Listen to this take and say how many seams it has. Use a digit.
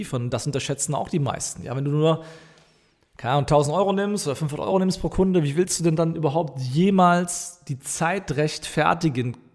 0